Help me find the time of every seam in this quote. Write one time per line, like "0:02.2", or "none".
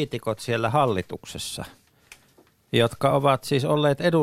none